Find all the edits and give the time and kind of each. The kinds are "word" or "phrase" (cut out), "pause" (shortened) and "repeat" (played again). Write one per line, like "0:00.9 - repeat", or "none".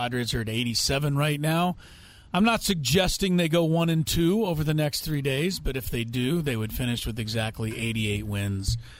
none